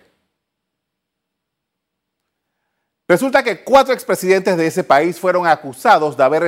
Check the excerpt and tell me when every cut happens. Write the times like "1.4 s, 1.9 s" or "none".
none